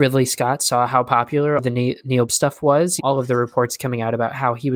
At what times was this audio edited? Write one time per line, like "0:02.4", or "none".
0:01.6
0:02.3
0:03.0